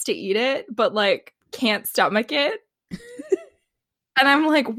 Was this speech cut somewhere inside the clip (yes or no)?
yes